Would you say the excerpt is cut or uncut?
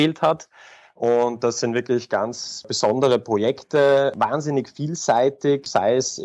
uncut